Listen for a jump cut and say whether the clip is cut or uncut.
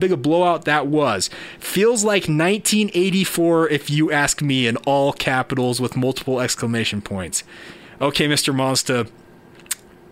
cut